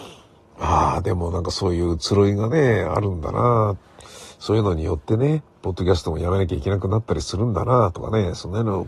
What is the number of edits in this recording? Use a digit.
1